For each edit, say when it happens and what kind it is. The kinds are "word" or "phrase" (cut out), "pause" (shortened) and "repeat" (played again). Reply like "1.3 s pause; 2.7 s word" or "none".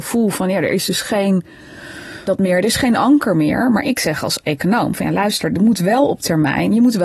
2.3 s phrase